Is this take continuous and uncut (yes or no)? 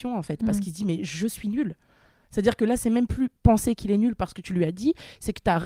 yes